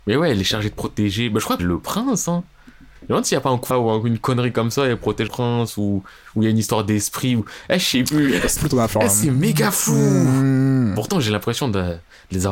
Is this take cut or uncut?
cut